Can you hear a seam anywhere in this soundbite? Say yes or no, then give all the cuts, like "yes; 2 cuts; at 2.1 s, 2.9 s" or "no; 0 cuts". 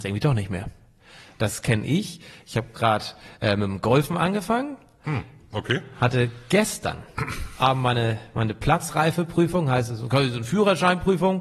no; 0 cuts